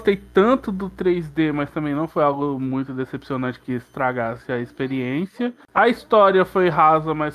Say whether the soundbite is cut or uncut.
uncut